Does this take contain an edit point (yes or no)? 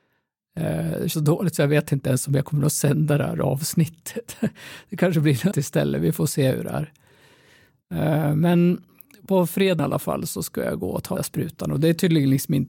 yes